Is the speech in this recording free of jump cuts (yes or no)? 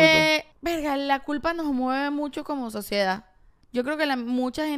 yes